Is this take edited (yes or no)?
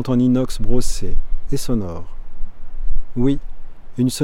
yes